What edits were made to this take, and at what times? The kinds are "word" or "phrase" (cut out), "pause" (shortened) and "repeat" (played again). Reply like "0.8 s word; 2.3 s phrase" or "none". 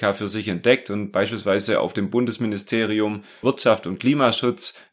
3.4 s word